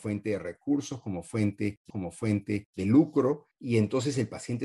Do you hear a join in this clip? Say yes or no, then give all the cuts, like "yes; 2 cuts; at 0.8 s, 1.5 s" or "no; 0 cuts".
yes; 1 cut; at 1.9 s